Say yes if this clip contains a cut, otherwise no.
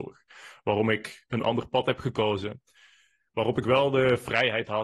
no